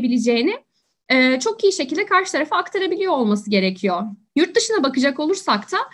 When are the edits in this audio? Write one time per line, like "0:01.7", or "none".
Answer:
0:04.3

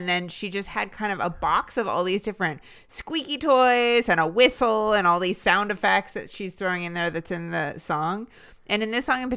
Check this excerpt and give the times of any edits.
none

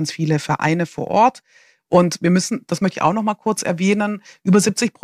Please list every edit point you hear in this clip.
none

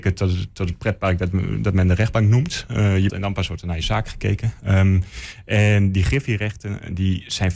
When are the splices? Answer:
0:03.1

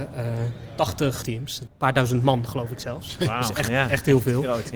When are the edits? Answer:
0:01.2
0:01.7

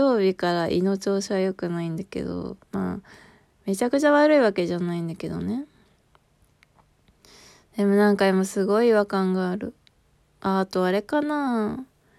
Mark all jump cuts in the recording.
0:02.6

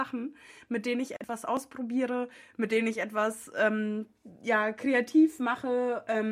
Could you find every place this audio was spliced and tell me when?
none

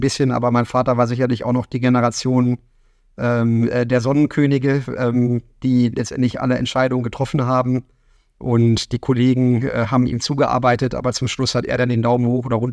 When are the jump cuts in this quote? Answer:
none

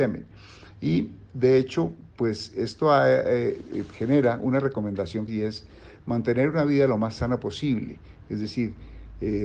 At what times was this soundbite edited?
0:02.1
0:05.3

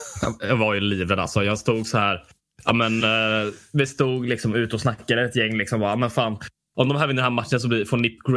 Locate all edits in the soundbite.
none

